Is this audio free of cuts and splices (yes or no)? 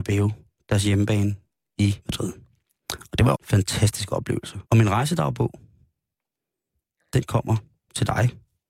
no